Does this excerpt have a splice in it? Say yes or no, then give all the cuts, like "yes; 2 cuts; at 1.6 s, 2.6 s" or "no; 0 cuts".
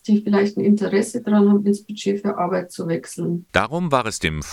no; 0 cuts